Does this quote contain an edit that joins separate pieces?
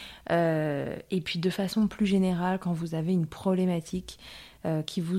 no; 0 cuts

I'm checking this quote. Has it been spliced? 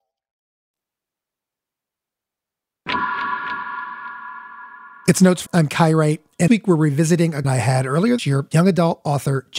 yes; 5 cuts; at 5.5 s, 6.5 s, 7.4 s, 8.2 s, 8.5 s

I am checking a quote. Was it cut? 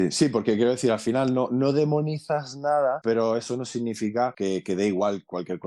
no; 0 cuts

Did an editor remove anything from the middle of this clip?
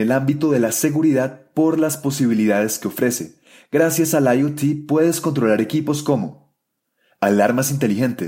no; 0 cuts

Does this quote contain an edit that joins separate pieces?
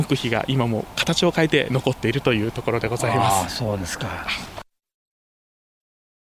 no; 0 cuts

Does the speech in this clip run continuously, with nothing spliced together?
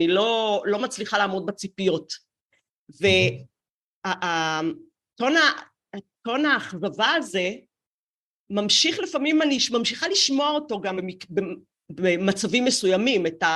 no; 1 cut; at 11.0 s

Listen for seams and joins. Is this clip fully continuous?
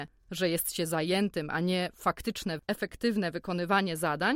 yes; 0 cuts

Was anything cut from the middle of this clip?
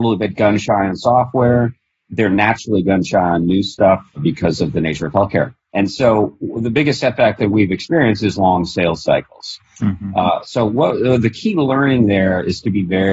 no; 0 cuts

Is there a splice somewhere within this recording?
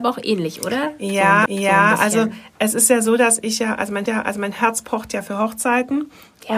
yes; 2 cuts; at 1.5 s, 4.1 s

